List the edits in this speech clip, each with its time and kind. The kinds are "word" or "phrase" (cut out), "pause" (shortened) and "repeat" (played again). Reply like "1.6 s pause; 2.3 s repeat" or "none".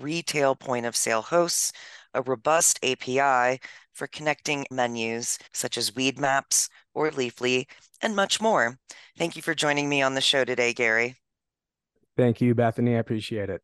4.7 s word; 5.5 s pause